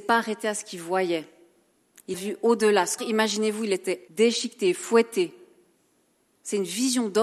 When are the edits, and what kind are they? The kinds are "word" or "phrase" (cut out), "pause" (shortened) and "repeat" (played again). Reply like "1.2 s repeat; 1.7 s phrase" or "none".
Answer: 2.1 s word; 3.0 s word; 4.1 s word